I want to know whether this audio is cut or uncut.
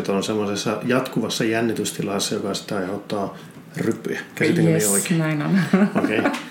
uncut